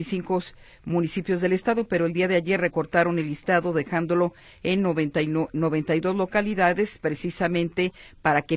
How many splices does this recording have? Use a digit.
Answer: 0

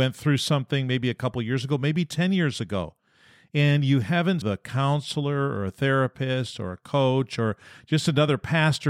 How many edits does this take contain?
1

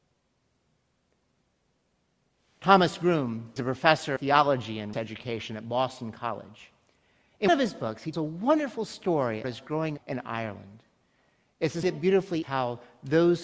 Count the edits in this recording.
9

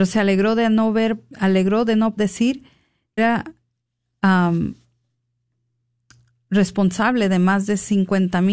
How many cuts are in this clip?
3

